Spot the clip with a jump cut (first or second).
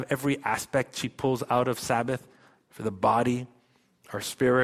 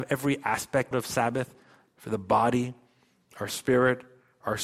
second